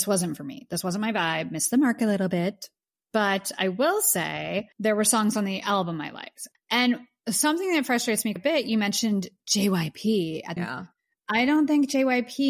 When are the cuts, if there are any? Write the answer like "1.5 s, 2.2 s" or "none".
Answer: 4.7 s, 8.4 s, 10.6 s